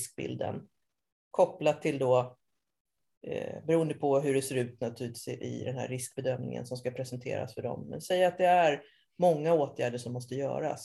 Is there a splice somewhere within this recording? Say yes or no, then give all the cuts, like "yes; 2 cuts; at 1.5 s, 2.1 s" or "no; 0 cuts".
no; 0 cuts